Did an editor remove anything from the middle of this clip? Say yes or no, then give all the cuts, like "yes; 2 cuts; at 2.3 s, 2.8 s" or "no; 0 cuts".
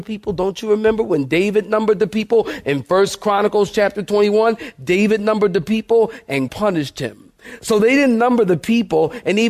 yes; 1 cut; at 6.5 s